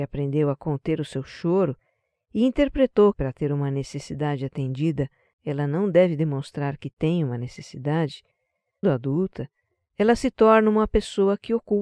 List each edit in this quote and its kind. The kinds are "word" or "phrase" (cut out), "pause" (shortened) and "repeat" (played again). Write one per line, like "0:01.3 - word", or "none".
0:03.1 - word
0:08.8 - word